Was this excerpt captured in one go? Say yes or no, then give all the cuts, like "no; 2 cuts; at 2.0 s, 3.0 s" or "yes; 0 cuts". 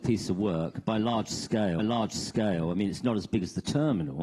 no; 1 cut; at 1.8 s